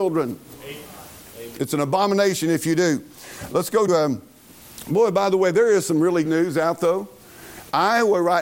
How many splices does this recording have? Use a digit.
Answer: 3